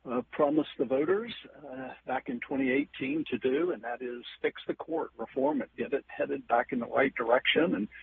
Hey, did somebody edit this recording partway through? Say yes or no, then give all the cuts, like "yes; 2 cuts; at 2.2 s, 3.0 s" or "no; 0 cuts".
no; 0 cuts